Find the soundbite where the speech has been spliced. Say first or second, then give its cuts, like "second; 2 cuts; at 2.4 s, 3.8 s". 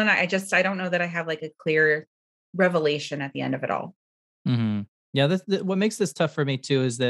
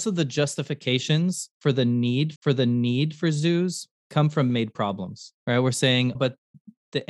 second; 5 cuts; at 2.4 s, 4.0 s, 4.5 s, 5.4 s, 6.1 s